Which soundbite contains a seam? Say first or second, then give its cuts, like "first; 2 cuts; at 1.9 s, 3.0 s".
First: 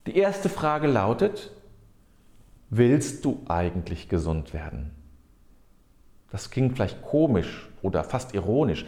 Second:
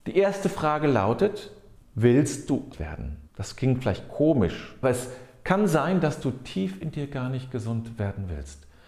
second; 4 cuts; at 1.8 s, 2.7 s, 3.3 s, 4.8 s